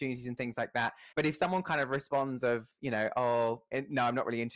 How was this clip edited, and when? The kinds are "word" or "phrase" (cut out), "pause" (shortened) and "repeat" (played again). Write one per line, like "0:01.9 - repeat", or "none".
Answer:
0:01.1 - pause